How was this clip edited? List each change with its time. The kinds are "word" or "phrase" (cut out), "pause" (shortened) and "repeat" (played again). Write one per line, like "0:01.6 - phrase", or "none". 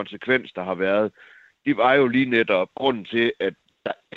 0:02.7 - word